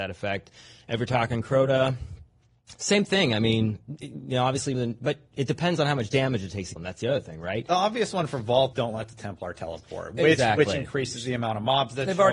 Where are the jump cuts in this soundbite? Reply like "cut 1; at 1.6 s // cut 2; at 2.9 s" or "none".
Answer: cut 1; at 4.7 s // cut 2; at 6.8 s // cut 3; at 8.7 s